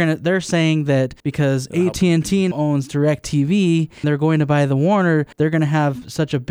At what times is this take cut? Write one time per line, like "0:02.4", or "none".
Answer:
0:01.2
0:02.5
0:04.0
0:05.3